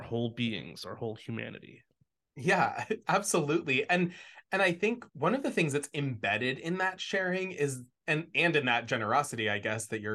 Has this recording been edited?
yes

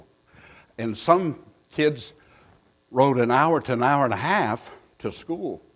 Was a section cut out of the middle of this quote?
no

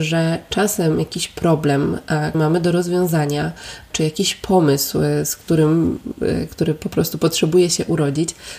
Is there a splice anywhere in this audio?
yes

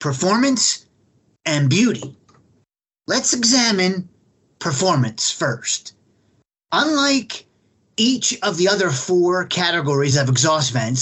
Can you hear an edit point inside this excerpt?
no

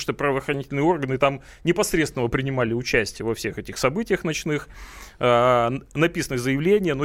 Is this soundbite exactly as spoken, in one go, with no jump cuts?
yes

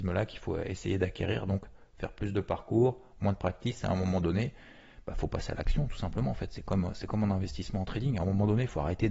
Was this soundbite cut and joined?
no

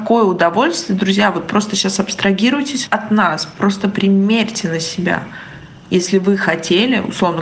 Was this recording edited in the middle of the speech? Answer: no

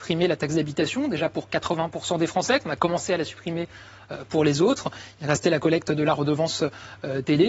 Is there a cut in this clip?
no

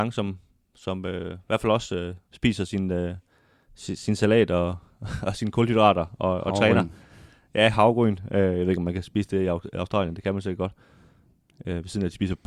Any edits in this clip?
no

